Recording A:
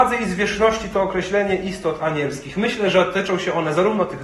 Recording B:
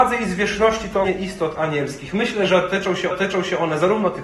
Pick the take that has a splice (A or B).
B